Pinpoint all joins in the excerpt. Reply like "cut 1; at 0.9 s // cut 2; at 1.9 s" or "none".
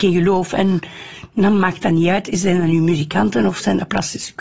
none